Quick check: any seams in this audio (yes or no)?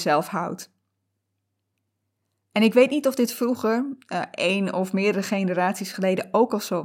no